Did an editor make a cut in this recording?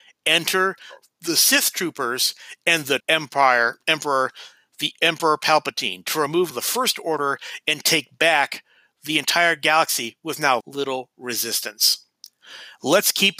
yes; 3 cuts; at 3.0 s, 6.5 s, 10.6 s

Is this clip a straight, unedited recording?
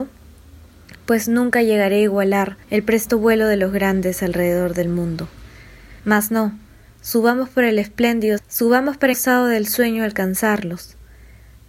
no; 4 cuts; at 2.6 s, 6.0 s, 8.4 s, 9.1 s

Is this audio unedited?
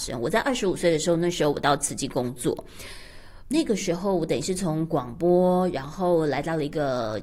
no; 1 cut; at 3.5 s

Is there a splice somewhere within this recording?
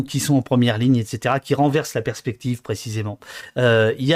no; 0 cuts

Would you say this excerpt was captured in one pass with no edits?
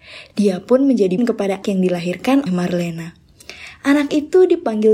no; 3 cuts; at 1.2 s, 1.6 s, 2.5 s

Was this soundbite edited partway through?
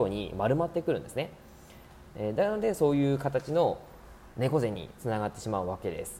yes; 1 cut; at 4.3 s

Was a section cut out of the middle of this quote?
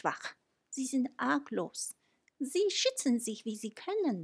no; 0 cuts

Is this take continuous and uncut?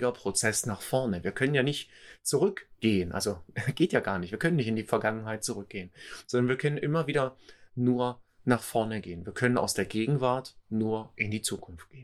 yes; 0 cuts

